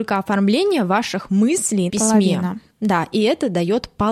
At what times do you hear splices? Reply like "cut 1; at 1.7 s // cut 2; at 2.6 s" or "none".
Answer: cut 1; at 1.9 s

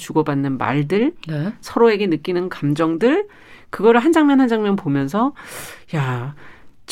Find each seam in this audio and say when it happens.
none

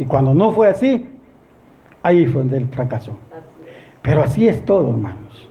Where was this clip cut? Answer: none

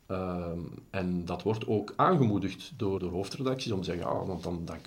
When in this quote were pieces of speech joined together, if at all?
cut 1; at 3.0 s

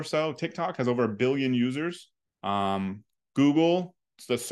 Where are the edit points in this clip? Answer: cut 1; at 2.2 s

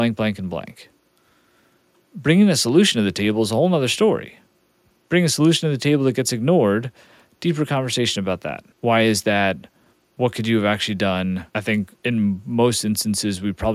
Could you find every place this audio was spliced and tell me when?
cut 1; at 8.7 s // cut 2; at 9.9 s // cut 3; at 11.5 s // cut 4; at 12.0 s

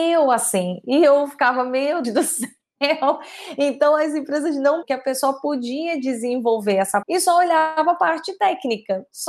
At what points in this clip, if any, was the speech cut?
cut 1; at 2.0 s // cut 2; at 4.8 s // cut 3; at 7.0 s

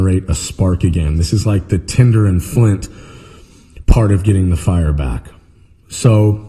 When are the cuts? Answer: none

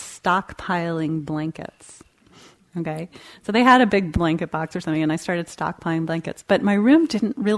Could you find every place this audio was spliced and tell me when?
none

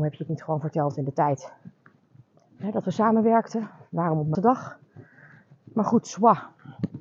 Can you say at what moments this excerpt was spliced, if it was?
cut 1; at 4.3 s

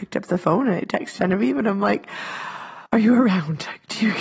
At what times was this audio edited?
cut 1; at 2.9 s

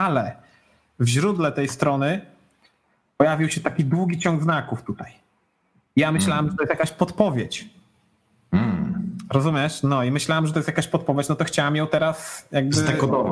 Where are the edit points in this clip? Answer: none

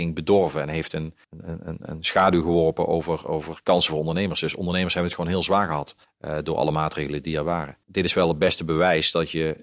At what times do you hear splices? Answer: cut 1; at 1.2 s // cut 2; at 6.0 s // cut 3; at 7.8 s

